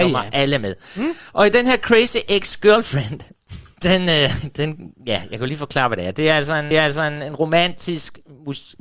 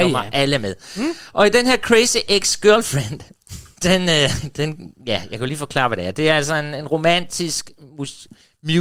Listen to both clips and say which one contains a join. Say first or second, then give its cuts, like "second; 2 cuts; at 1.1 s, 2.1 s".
first; 1 cut; at 6.7 s